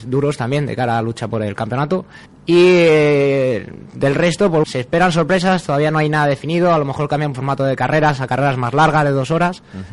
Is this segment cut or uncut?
cut